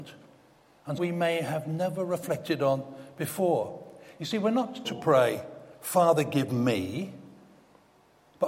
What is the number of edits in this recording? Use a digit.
2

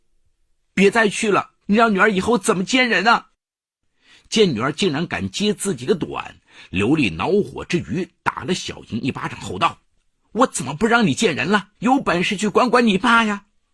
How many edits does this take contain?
4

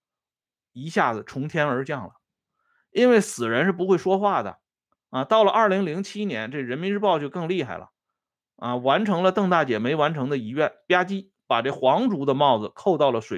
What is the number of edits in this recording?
0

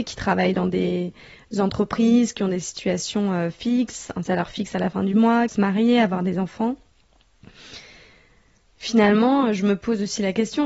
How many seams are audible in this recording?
1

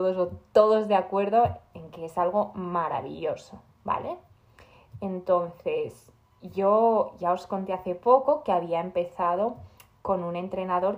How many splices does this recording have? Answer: 0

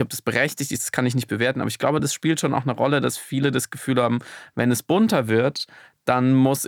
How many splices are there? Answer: 0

